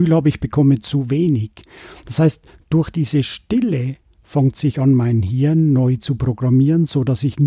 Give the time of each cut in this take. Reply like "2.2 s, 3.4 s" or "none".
none